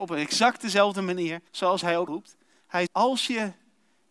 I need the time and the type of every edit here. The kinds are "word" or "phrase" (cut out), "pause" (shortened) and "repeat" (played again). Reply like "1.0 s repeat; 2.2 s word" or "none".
1.5 s pause; 2.1 s word; 2.9 s word

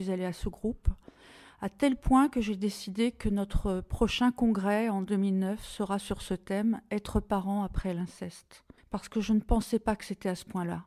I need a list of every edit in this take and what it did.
8.8 s pause

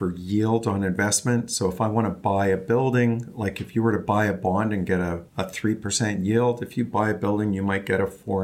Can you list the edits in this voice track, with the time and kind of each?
5.3 s pause

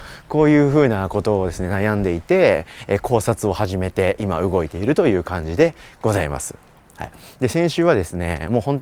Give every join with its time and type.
none

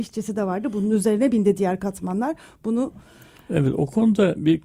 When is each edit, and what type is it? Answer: none

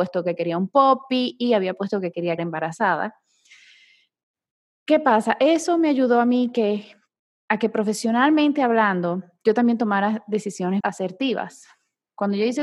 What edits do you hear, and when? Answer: 2.4 s word; 10.8 s word

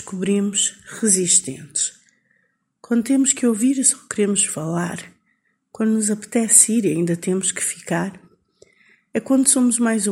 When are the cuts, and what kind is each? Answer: none

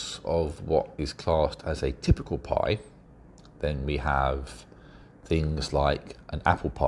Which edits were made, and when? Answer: none

